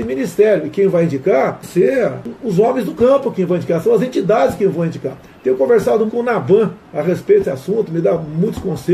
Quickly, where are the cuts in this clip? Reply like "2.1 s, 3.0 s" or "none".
1.6 s, 6.1 s, 7.4 s